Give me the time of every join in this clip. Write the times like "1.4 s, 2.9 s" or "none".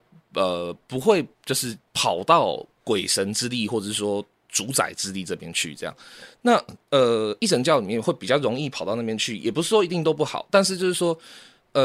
1.3 s, 1.9 s